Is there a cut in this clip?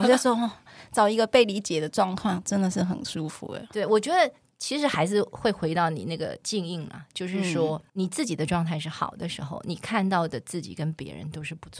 no; 0 cuts

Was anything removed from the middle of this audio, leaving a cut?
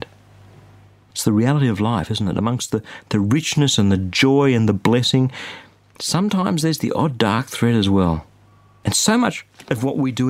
no; 0 cuts

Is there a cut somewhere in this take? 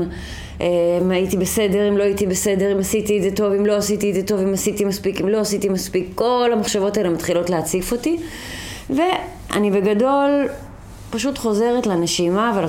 no; 0 cuts

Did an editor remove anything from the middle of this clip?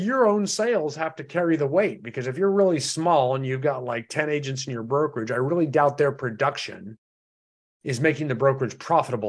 no; 0 cuts

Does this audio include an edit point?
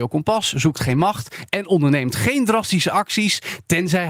no; 0 cuts

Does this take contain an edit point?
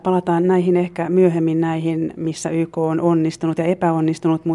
no; 0 cuts

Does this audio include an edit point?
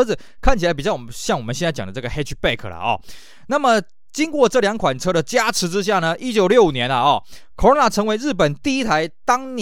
no; 0 cuts

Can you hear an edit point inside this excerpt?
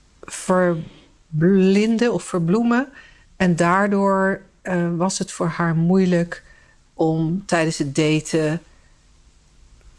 no; 0 cuts

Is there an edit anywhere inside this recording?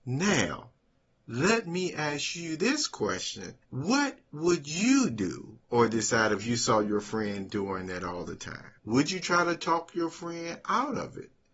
yes; 3 cuts; at 3.6 s, 5.6 s, 8.8 s

